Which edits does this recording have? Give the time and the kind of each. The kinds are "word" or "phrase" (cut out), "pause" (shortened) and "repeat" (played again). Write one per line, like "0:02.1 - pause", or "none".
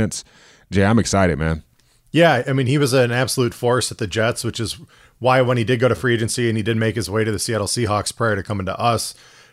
none